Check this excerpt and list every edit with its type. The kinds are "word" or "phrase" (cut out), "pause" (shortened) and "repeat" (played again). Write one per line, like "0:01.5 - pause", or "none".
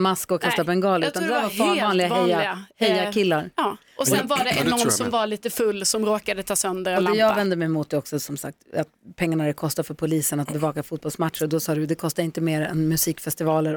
none

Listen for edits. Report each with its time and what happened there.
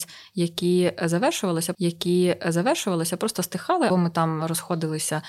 0:01.7 - repeat
0:03.9 - word

